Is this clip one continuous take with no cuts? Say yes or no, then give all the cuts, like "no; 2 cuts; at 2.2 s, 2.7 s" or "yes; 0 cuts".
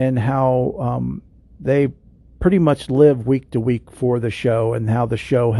yes; 0 cuts